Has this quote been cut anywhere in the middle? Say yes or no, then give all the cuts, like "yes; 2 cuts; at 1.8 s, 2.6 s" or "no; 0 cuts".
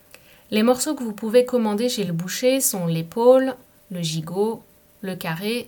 no; 0 cuts